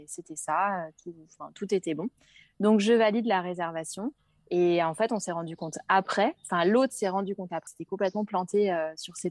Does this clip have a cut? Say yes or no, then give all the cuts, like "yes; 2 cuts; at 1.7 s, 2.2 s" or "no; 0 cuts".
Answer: yes; 1 cut; at 7.7 s